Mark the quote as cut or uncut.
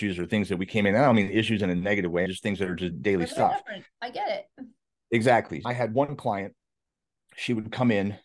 uncut